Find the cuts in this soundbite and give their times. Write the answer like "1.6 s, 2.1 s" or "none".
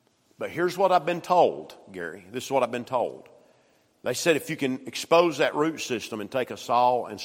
none